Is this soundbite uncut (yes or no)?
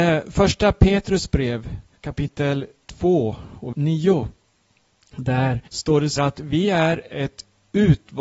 no